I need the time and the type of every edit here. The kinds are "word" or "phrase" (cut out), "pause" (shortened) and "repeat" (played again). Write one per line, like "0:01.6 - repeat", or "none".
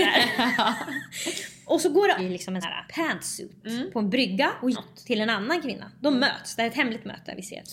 0:02.2 - phrase
0:02.6 - word
0:04.7 - word